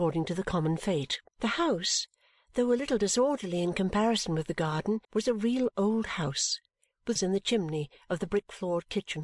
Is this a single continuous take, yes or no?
no